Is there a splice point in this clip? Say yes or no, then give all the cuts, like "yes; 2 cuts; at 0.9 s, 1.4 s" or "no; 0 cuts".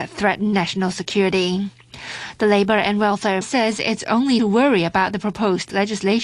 yes; 2 cuts; at 3.4 s, 4.4 s